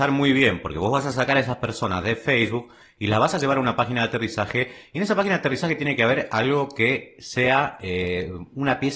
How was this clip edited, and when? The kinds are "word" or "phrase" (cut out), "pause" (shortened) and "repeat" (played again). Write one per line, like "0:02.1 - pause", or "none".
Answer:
none